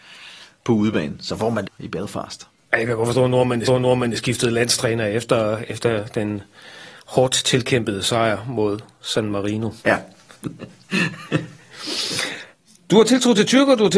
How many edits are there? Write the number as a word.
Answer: three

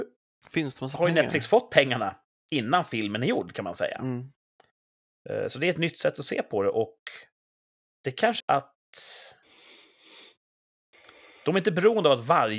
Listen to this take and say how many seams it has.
one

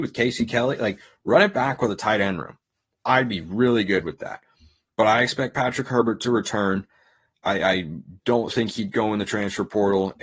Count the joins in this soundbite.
zero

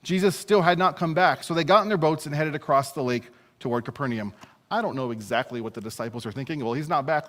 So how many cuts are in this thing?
zero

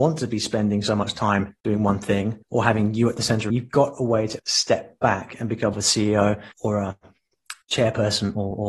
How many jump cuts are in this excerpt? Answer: seven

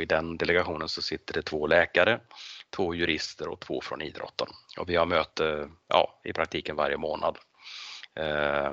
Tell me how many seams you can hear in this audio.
zero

